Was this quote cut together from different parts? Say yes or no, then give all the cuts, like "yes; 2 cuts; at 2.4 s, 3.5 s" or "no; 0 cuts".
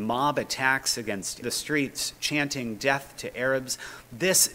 yes; 1 cut; at 1.4 s